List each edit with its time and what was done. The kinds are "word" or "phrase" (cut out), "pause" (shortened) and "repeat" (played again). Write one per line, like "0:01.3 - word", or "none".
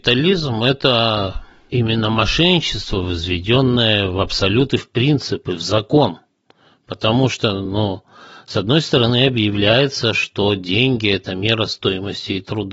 none

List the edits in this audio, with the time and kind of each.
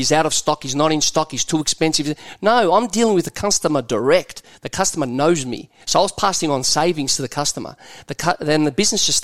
0:05.8 - pause

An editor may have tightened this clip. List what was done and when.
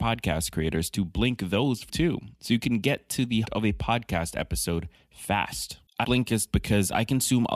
0:01.9 - word
0:03.4 - word
0:06.0 - word

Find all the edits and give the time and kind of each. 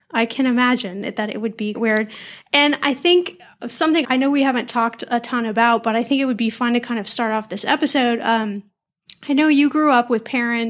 0:01.7 - word
0:04.0 - word

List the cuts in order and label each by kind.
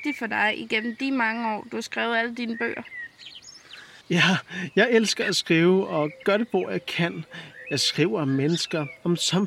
0:04.0 - pause

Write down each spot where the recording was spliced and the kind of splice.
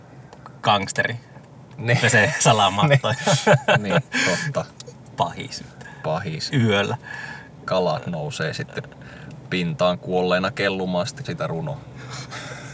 0:11.2 - word

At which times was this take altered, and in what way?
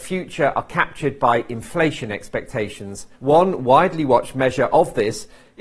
0:03.1 - pause

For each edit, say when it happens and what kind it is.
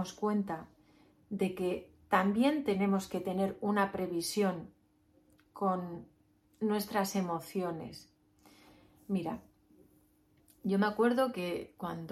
none

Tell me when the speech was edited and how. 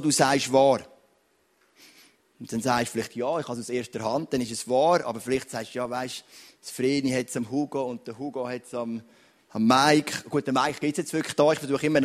none

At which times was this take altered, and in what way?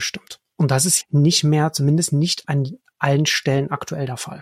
0:01.0 - word

